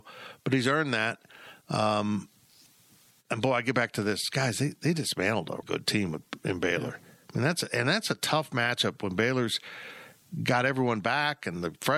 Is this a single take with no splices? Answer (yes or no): no